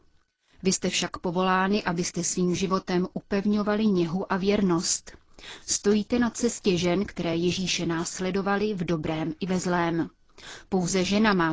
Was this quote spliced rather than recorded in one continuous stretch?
no; 0 cuts

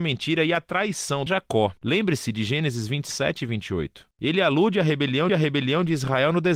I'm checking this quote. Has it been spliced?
yes; 2 cuts; at 1.3 s, 5.3 s

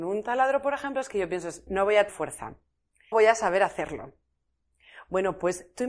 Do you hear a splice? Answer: yes; 3 cuts; at 1.7 s, 2.1 s, 3.1 s

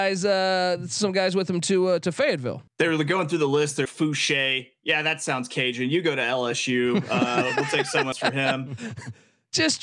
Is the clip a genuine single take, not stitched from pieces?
no; 3 cuts; at 2.7 s, 3.8 s, 8.1 s

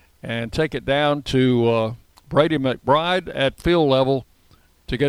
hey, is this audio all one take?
no; 1 cut; at 2.0 s

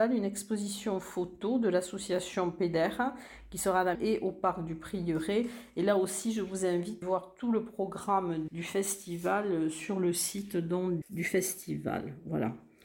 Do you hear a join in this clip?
yes; 4 cuts; at 3.9 s, 7.0 s, 8.5 s, 11.0 s

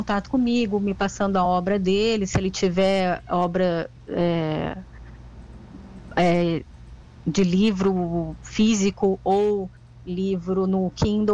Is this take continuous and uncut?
yes; 0 cuts

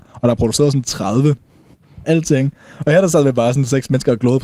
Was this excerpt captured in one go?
no; 1 cut; at 2.0 s

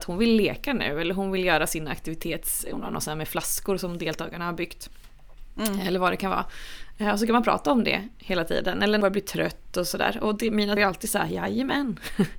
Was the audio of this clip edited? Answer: yes; 2 cuts; at 9.0 s, 10.8 s

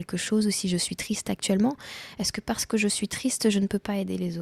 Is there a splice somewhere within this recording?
no; 0 cuts

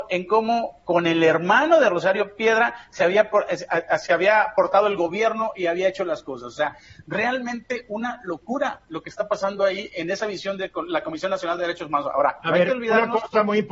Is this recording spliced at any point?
no; 0 cuts

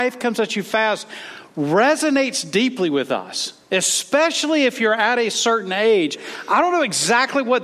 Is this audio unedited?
yes; 0 cuts

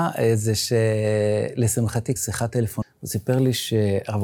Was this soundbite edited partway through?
yes; 2 cuts; at 2.2 s, 2.8 s

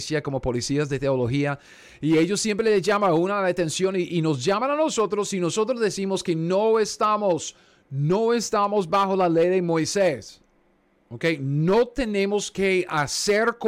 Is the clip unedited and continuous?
yes; 0 cuts

